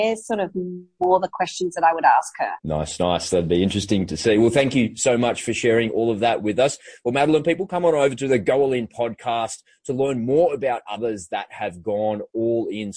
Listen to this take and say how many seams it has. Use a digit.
1